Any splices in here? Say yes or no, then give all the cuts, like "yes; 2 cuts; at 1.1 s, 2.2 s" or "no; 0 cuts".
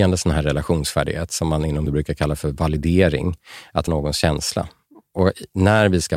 yes; 2 cuts; at 1.9 s, 3.9 s